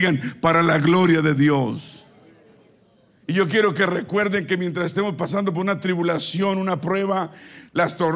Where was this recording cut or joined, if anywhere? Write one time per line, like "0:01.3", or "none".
none